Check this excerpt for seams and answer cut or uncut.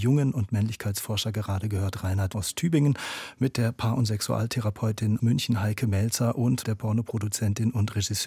cut